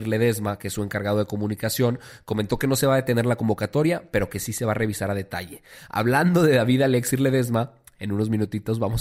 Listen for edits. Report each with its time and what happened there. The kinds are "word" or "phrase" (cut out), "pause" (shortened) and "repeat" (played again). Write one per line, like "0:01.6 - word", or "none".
none